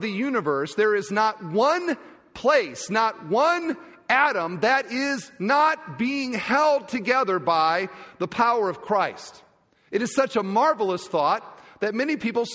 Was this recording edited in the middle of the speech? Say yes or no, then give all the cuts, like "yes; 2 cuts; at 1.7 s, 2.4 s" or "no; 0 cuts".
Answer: no; 0 cuts